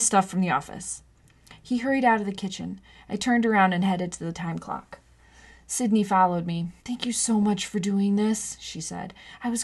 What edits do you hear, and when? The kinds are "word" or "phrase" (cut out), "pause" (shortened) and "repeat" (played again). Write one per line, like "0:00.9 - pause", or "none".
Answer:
0:06.8 - pause